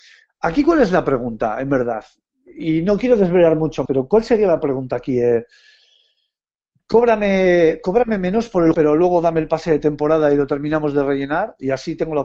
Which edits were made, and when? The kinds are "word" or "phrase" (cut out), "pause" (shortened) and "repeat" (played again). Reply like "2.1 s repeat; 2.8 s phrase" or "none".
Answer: 3.9 s word; 8.7 s word